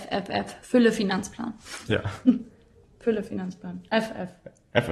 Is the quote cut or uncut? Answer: cut